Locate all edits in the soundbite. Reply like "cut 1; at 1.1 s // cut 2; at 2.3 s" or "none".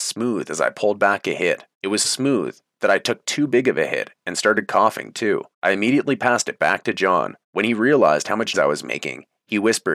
cut 1; at 1.7 s // cut 2; at 2.0 s // cut 3; at 5.5 s // cut 4; at 7.4 s // cut 5; at 8.5 s